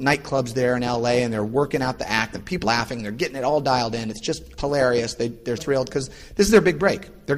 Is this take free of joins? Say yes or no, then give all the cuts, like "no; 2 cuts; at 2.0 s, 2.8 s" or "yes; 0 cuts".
no; 3 cuts; at 2.6 s, 4.6 s, 5.6 s